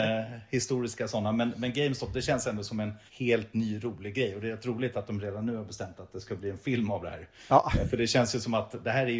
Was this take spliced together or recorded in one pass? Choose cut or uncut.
cut